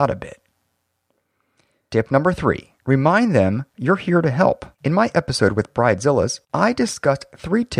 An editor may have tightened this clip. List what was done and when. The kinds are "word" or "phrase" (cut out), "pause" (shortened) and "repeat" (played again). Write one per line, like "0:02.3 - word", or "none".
0:02.8 - pause
0:03.7 - pause
0:04.7 - pause
0:06.4 - pause